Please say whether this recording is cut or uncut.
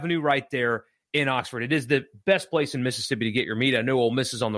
uncut